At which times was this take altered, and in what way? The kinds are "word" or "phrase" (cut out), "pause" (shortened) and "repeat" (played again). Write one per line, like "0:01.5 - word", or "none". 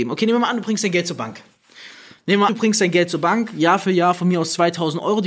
0:02.5 - word